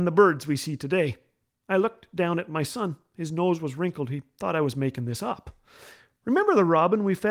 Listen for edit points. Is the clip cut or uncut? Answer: uncut